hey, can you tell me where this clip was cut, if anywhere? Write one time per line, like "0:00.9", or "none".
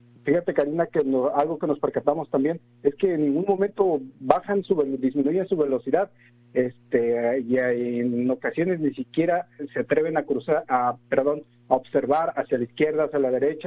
none